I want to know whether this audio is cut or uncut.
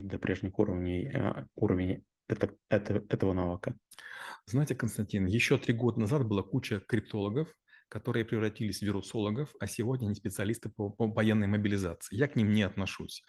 uncut